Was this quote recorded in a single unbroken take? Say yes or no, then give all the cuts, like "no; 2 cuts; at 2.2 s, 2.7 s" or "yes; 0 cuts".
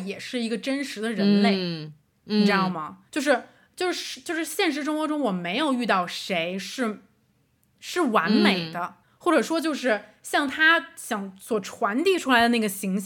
no; 2 cuts; at 3.1 s, 9.0 s